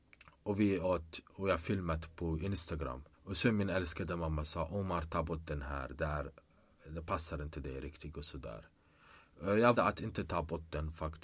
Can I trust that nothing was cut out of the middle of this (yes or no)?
no